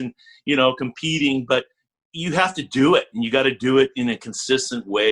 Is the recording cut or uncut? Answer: uncut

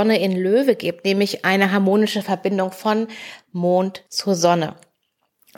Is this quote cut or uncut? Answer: cut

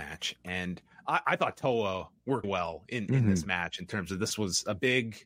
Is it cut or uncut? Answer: cut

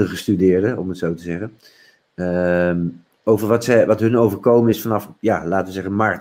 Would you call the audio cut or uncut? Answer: uncut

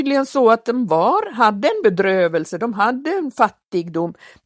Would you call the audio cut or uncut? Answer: uncut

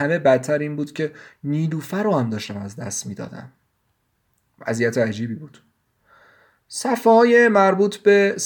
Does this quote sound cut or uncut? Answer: uncut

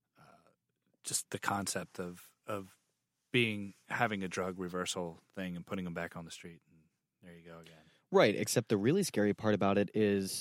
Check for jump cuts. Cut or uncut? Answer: uncut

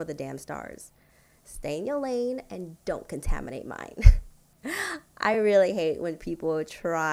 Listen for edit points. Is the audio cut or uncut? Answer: uncut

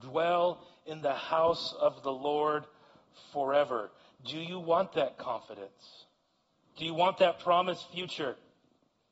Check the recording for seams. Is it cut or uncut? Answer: uncut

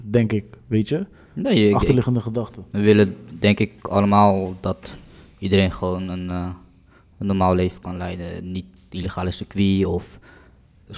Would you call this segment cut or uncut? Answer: uncut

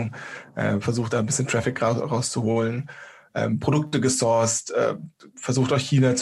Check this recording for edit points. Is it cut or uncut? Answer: uncut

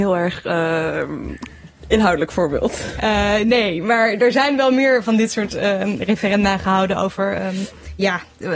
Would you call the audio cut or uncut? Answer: uncut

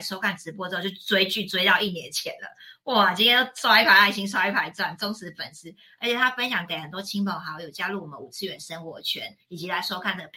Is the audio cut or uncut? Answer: uncut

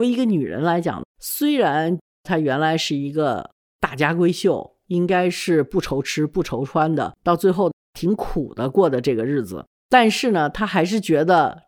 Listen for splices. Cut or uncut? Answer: cut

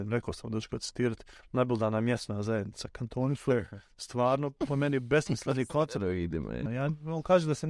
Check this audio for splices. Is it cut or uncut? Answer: cut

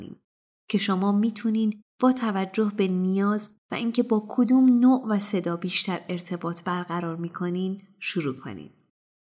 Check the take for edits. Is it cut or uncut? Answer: uncut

